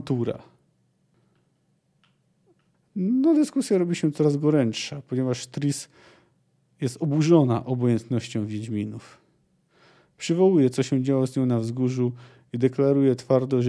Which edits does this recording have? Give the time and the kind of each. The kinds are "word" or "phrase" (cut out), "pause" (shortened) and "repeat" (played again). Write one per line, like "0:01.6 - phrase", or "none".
none